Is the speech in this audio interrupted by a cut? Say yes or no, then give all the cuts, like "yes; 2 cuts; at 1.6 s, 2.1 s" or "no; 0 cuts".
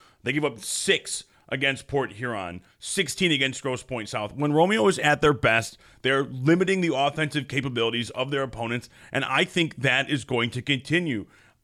no; 0 cuts